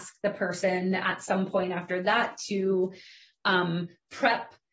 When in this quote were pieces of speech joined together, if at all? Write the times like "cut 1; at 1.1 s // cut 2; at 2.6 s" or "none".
none

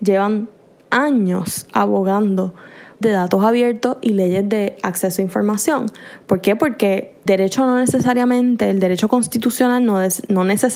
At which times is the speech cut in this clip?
cut 1; at 3.0 s // cut 2; at 7.3 s

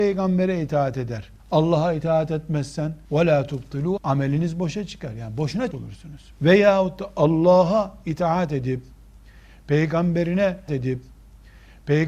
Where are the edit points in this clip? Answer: cut 1; at 1.4 s // cut 2; at 3.0 s // cut 3; at 4.0 s // cut 4; at 5.7 s // cut 5; at 6.3 s // cut 6; at 10.7 s

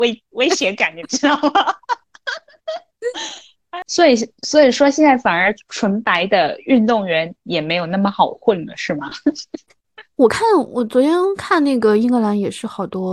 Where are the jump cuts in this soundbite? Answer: none

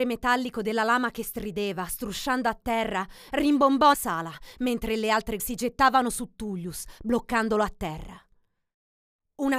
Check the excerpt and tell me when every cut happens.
cut 1; at 3.9 s // cut 2; at 5.4 s

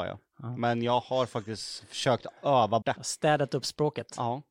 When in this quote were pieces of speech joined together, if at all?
cut 1; at 2.8 s

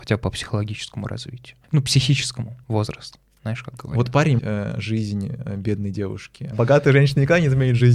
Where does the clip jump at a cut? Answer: cut 1; at 1.6 s // cut 2; at 2.6 s // cut 3; at 4.4 s // cut 4; at 6.5 s

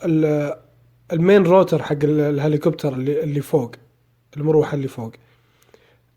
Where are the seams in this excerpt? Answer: none

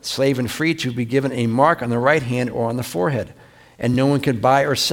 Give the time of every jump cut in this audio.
none

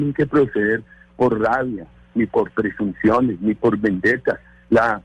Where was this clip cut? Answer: none

